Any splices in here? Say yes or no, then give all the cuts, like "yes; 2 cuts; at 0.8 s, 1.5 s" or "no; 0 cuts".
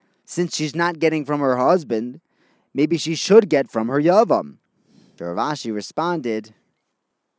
no; 0 cuts